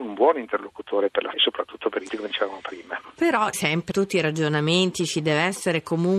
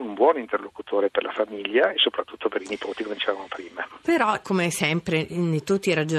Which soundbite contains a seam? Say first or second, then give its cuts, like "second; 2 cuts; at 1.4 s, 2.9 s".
first; 4 cuts; at 1.3 s, 2.1 s, 3.5 s, 3.9 s